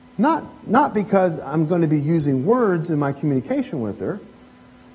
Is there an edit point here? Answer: no; 0 cuts

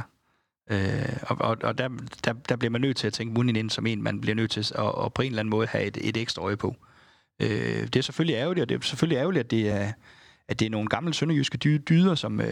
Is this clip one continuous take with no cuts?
yes; 0 cuts

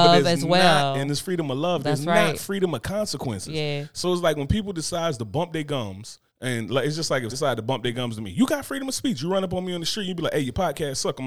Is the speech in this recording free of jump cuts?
no; 2 cuts; at 6.3 s, 7.3 s

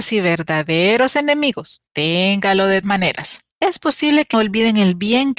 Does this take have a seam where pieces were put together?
yes; 4 cuts; at 1.9 s, 2.8 s, 3.5 s, 4.3 s

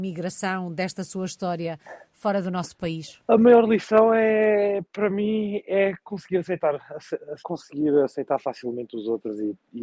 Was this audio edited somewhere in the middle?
yes; 1 cut; at 7.4 s

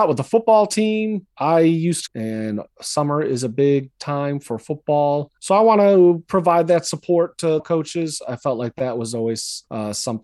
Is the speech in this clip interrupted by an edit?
yes; 2 cuts; at 2.1 s, 7.6 s

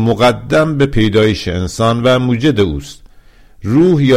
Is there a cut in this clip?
no; 0 cuts

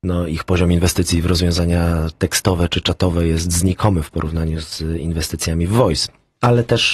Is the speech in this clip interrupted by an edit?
no; 0 cuts

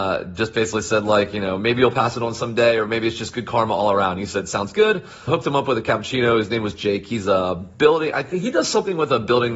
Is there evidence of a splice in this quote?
yes; 1 cut; at 5.3 s

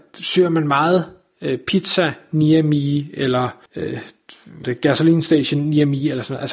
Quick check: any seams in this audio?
yes; 2 cuts; at 3.7 s, 4.6 s

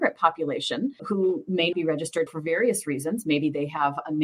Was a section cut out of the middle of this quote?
yes; 3 cuts; at 1.0 s, 1.7 s, 2.3 s

